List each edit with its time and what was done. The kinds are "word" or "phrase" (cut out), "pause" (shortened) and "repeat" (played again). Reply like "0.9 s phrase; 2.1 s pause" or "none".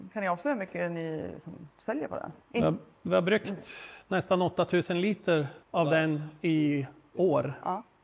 1.7 s pause; 2.4 s pause; 5.6 s pause